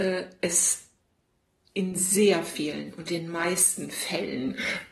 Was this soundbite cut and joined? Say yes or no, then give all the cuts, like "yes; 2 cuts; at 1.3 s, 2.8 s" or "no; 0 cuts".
no; 0 cuts